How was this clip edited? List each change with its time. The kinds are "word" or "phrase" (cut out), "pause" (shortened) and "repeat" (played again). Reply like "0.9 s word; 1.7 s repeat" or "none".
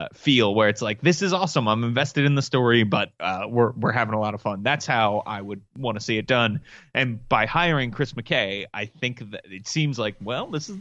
none